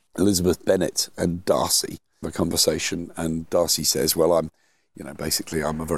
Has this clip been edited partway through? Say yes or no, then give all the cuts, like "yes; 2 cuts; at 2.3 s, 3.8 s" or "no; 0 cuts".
yes; 1 cut; at 2.2 s